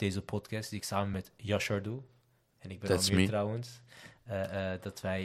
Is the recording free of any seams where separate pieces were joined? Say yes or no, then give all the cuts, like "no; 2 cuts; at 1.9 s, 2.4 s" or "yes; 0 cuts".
yes; 0 cuts